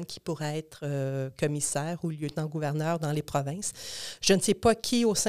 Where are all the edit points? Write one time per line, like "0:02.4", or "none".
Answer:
none